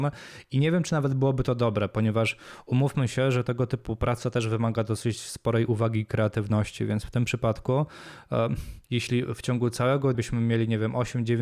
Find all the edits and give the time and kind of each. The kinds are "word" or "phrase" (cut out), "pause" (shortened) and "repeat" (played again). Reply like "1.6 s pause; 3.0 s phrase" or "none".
8.8 s pause; 10.1 s word